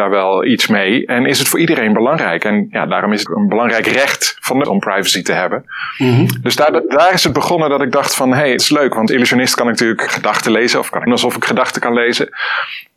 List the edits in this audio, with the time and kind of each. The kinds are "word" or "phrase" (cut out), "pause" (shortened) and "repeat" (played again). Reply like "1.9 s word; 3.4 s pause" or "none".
3.3 s word; 4.6 s word; 8.6 s word; 9.1 s word; 10.1 s word; 11.1 s word